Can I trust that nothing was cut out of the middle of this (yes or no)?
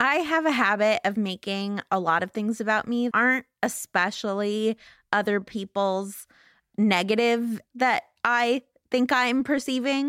no